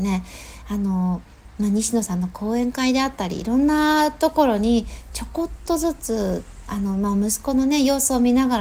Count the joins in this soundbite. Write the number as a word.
zero